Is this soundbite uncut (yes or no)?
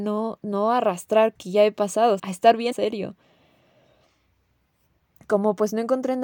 no